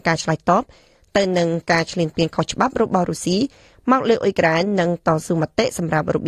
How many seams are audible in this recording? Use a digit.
0